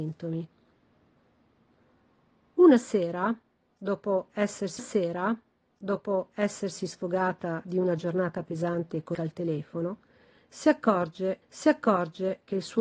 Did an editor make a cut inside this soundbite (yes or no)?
yes